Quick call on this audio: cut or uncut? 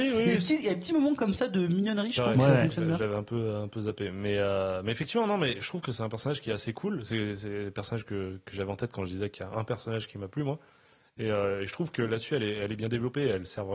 uncut